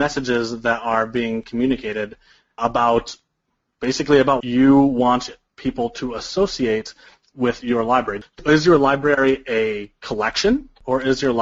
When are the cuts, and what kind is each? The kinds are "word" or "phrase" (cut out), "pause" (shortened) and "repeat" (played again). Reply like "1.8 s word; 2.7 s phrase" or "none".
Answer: 2.6 s word; 4.4 s word